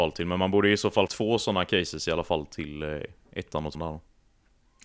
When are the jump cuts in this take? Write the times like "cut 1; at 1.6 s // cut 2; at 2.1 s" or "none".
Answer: cut 1; at 1.1 s // cut 2; at 3.7 s